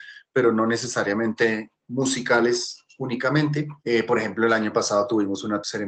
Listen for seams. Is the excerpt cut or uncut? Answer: cut